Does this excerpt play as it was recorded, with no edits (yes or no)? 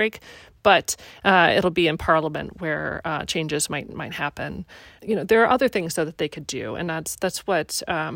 yes